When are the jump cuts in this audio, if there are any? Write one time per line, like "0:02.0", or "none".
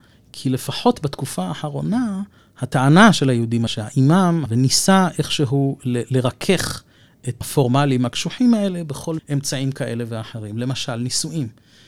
0:02.4
0:03.7
0:04.5
0:07.4
0:09.2